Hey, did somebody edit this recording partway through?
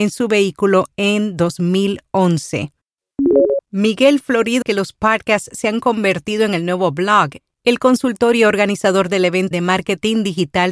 yes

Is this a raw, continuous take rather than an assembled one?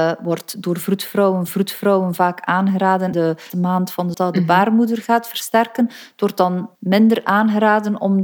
no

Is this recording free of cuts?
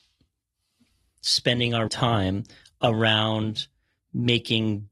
no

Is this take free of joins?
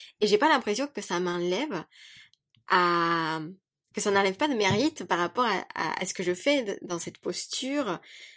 yes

